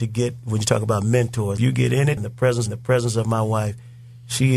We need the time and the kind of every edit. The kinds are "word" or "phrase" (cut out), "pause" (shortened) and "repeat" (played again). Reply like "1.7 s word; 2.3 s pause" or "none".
1.6 s phrase; 2.2 s word; 2.7 s repeat

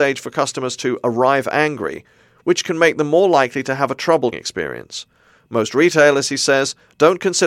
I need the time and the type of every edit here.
4.3 s word

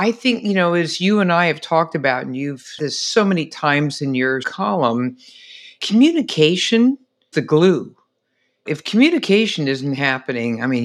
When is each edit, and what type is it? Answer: 2.8 s word; 4.4 s word; 7.3 s word

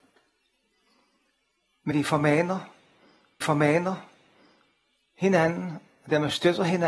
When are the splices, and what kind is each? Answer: 1.9 s word; 3.4 s repeat

